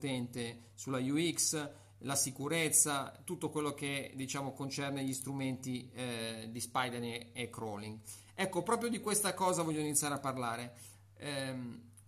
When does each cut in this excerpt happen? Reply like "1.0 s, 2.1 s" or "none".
none